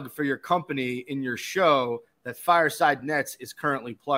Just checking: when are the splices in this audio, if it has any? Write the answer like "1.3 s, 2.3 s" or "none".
none